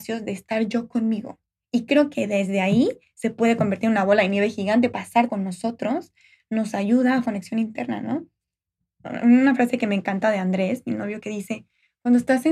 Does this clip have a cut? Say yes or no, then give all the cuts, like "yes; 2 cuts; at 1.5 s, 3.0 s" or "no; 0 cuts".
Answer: yes; 3 cuts; at 4.9 s, 5.3 s, 7.2 s